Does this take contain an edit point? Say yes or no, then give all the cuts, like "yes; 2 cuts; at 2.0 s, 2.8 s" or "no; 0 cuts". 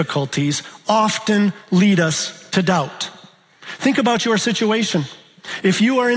no; 0 cuts